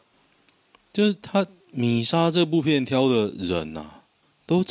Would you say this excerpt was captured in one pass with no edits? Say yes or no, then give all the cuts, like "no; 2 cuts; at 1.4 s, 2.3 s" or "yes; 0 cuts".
no; 1 cut; at 1.6 s